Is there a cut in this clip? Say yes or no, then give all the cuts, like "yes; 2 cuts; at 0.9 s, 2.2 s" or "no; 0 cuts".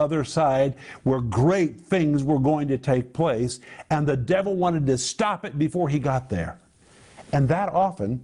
no; 0 cuts